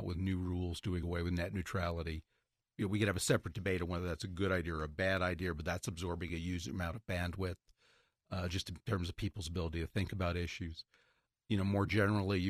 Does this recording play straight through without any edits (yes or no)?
yes